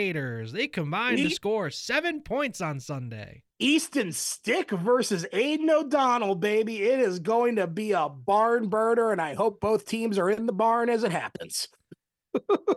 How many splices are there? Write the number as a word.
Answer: one